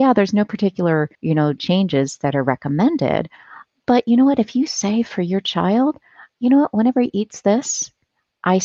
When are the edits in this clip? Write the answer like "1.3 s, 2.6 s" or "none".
1.1 s, 1.6 s